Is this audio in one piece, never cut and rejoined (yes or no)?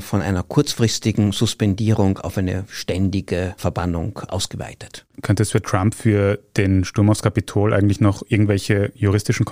no